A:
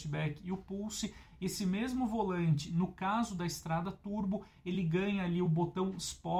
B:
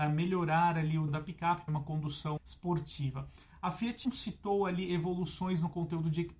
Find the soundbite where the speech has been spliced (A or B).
B